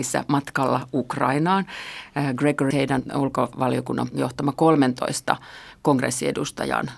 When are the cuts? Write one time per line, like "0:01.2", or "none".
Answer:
0:02.7
0:04.1